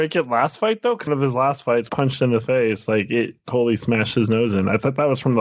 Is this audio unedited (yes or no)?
no